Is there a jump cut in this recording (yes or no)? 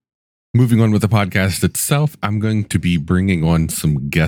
no